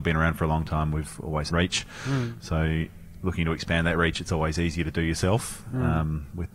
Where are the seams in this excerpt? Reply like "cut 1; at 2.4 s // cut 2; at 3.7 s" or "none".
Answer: cut 1; at 1.5 s